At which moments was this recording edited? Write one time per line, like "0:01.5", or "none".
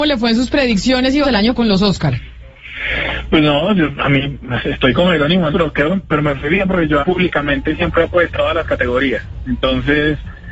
0:01.2
0:01.6
0:04.6
0:05.5
0:07.0
0:08.3

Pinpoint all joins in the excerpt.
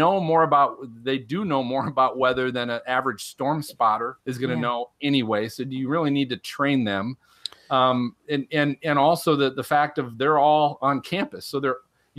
0:04.2

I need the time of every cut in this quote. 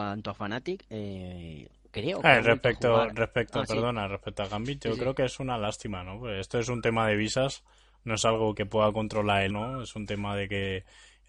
0:08.5
0:09.5

